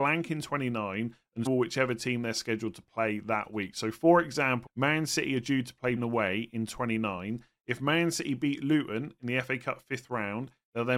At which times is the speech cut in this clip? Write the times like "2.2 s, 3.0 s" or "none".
1.5 s, 4.7 s, 6.0 s